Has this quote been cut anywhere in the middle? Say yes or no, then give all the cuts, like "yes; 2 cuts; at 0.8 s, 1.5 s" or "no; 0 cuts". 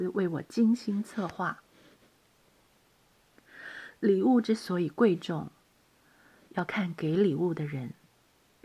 no; 0 cuts